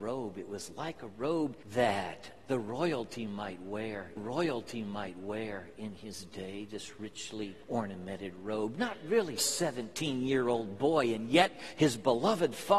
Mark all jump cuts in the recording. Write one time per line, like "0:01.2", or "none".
0:01.6
0:04.2
0:07.6
0:09.4